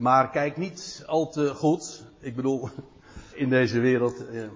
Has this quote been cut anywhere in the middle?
yes; 1 cut; at 3.3 s

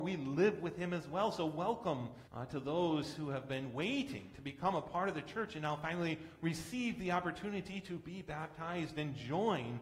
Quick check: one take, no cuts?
no; 1 cut; at 2.3 s

